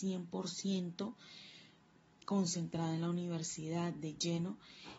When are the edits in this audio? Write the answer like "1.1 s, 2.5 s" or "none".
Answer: 2.2 s